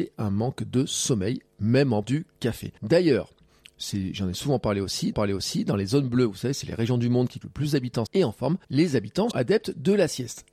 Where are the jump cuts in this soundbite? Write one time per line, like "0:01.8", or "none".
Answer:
0:02.0
0:02.8
0:05.1
0:07.4
0:08.1
0:08.6
0:09.3